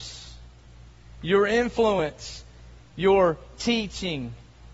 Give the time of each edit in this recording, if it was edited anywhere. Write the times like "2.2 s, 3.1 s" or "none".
none

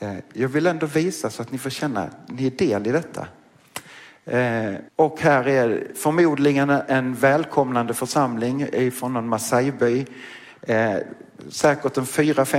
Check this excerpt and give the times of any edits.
4.9 s

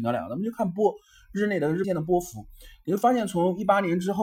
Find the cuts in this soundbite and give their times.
1.8 s

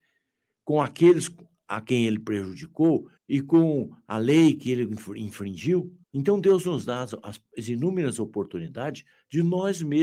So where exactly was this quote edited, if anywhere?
3.2 s, 6.0 s

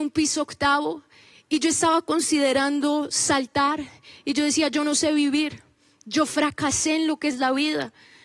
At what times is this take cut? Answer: none

